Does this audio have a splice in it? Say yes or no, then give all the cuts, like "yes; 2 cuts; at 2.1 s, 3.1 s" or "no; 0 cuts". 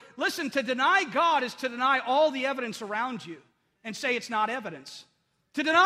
no; 0 cuts